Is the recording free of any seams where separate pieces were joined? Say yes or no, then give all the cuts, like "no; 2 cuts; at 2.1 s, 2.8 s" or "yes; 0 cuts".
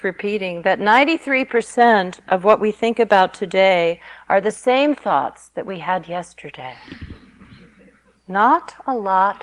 yes; 0 cuts